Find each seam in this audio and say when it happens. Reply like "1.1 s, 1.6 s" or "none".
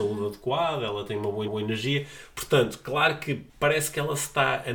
1.5 s, 3.5 s